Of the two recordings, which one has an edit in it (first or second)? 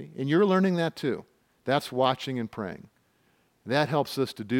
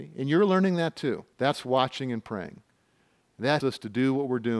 second